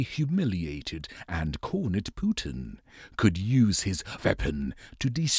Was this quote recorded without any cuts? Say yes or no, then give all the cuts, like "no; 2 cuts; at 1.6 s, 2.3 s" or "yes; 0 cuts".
no; 1 cut; at 4.2 s